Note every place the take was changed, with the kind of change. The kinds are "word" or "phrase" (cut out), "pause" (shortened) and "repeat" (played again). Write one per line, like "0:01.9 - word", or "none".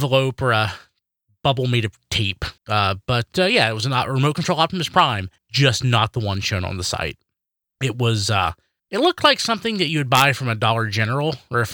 0:02.6 - pause
0:05.4 - pause
0:08.8 - pause